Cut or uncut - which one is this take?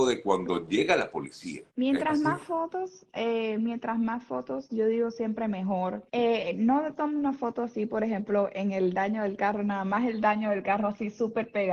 cut